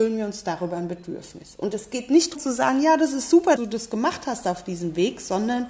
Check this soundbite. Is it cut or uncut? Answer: cut